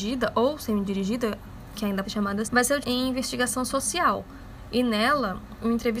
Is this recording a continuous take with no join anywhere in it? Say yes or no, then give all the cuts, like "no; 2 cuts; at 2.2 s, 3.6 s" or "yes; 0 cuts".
no; 3 cuts; at 2.0 s, 2.4 s, 2.8 s